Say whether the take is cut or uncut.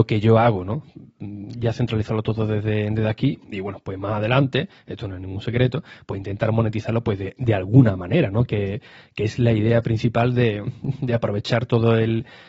uncut